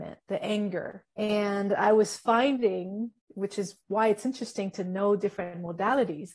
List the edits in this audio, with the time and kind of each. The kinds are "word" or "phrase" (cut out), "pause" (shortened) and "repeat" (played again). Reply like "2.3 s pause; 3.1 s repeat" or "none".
1.1 s pause; 3.2 s pause; 3.8 s pause